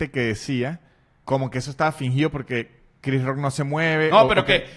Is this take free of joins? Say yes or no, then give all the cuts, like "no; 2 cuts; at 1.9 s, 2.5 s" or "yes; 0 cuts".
no; 1 cut; at 1.2 s